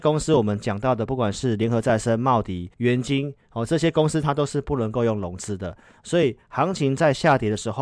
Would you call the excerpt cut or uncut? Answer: cut